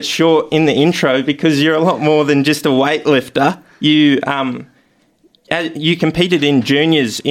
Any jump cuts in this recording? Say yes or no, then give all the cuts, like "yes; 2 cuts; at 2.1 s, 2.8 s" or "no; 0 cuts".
no; 0 cuts